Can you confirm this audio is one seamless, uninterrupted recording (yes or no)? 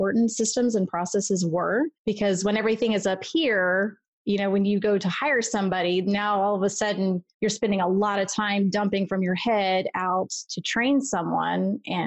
no